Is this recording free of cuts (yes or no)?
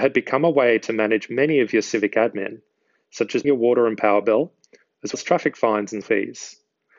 no